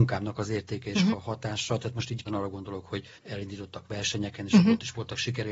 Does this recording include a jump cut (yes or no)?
yes